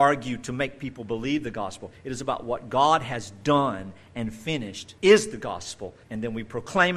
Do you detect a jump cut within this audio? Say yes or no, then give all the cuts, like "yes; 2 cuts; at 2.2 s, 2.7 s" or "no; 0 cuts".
yes; 2 cuts; at 5.0 s, 6.0 s